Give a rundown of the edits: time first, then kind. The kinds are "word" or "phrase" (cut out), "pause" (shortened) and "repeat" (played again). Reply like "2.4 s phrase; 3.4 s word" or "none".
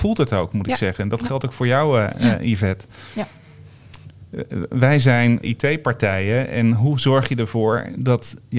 5.4 s phrase